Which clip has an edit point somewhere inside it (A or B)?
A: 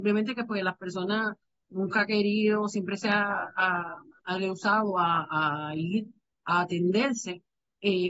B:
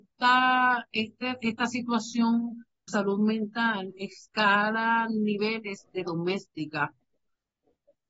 B